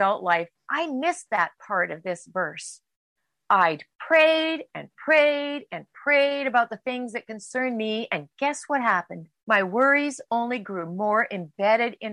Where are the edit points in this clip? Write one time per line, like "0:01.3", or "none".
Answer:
0:03.9
0:09.4